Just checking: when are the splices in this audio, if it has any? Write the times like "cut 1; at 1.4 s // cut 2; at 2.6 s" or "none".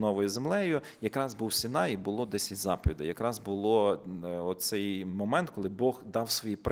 none